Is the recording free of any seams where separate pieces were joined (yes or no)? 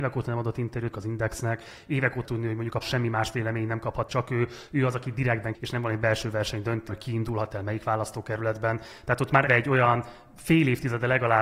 no